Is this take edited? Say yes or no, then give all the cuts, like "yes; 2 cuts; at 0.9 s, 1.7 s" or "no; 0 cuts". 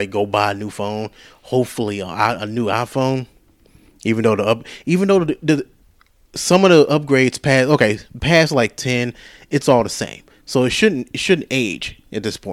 no; 0 cuts